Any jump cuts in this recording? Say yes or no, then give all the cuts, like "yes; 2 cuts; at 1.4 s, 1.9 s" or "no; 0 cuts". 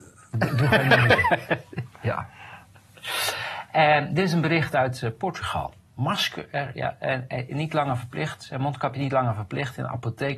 no; 0 cuts